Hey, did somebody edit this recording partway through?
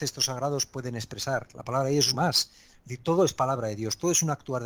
yes; 1 cut; at 2.1 s

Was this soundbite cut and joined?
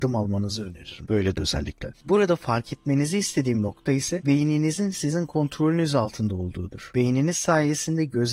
yes; 1 cut; at 1.3 s

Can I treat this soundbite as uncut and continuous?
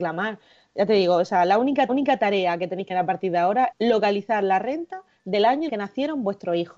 no; 4 cuts; at 1.9 s, 2.9 s, 3.7 s, 5.7 s

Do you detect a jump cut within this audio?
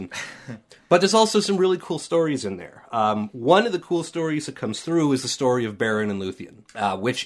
no; 0 cuts

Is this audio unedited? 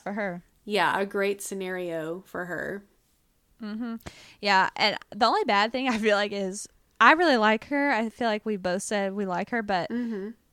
yes; 0 cuts

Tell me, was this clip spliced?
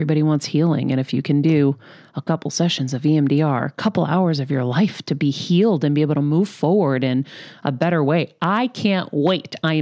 no; 0 cuts

